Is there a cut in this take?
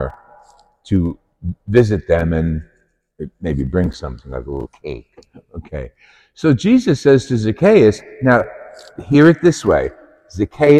no; 0 cuts

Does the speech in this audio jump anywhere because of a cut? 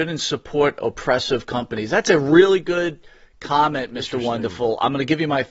no; 0 cuts

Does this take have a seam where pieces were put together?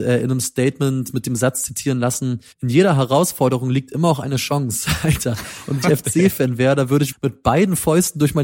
yes; 3 cuts; at 2.5 s, 5.8 s, 7.1 s

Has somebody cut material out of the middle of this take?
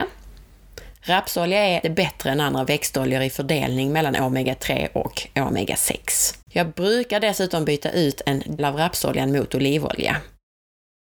yes; 3 cuts; at 1.8 s, 6.4 s, 8.6 s

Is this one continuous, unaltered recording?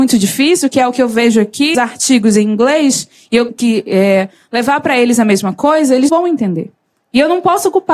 no; 3 cuts; at 1.7 s, 3.5 s, 6.1 s

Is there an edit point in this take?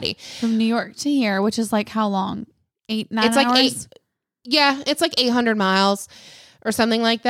no; 0 cuts

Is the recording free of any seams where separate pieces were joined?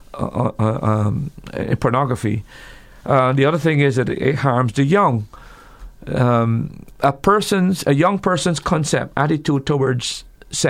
yes; 0 cuts

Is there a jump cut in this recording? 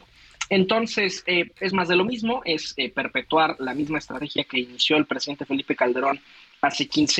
no; 0 cuts

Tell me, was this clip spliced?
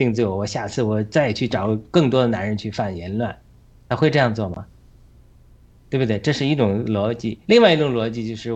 yes; 1 cut; at 7.4 s

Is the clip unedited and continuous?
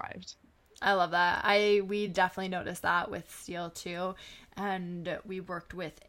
yes; 0 cuts

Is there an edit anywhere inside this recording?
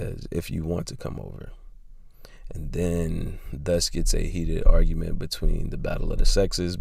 no; 0 cuts

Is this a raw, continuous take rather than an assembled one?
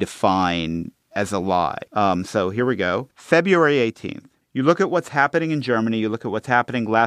no; 3 cuts; at 1.9 s, 3.1 s, 4.4 s

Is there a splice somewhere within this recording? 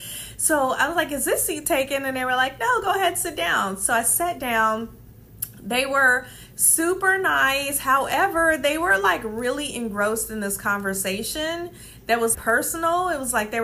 yes; 1 cut; at 12.3 s

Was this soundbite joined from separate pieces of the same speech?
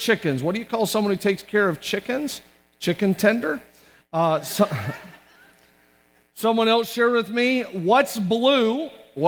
no; 0 cuts

